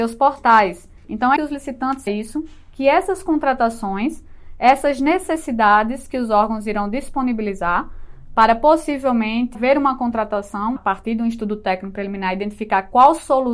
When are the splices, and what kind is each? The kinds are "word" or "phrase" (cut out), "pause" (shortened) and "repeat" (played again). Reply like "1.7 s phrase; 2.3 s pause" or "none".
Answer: 1.0 s pause; 1.4 s word; 2.1 s phrase; 9.5 s word; 10.8 s word